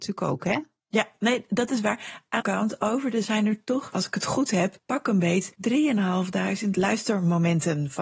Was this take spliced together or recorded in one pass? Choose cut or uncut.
cut